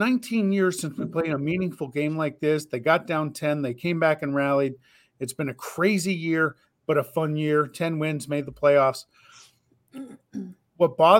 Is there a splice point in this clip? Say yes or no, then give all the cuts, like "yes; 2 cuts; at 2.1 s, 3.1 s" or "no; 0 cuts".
no; 0 cuts